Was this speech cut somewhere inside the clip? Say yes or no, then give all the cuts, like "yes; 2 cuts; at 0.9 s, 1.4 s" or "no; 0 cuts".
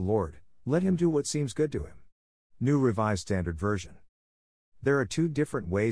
no; 0 cuts